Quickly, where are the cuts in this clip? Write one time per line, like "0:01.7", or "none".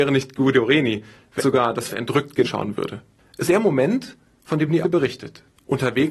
0:01.4
0:01.9
0:02.4
0:03.5
0:04.8